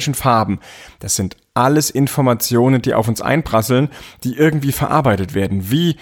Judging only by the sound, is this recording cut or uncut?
uncut